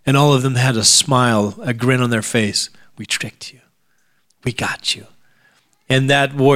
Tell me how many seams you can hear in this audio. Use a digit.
0